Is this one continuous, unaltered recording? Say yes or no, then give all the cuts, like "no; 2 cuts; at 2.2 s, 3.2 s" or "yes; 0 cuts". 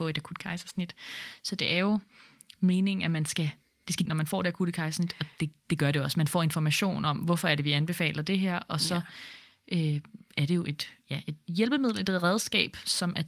no; 1 cut; at 4.1 s